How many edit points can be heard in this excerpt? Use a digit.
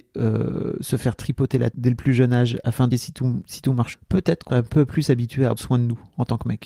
5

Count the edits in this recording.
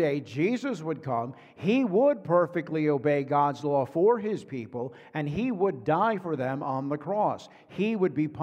0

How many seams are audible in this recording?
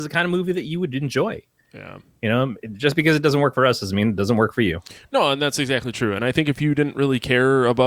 0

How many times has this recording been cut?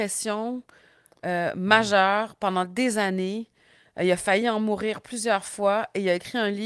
0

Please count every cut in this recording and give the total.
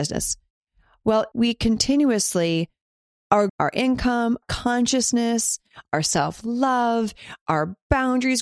4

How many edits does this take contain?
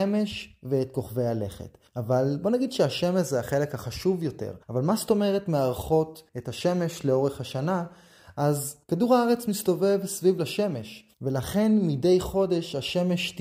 5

